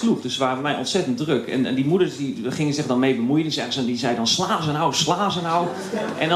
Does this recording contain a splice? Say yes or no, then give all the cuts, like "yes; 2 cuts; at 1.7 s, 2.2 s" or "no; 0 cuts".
no; 0 cuts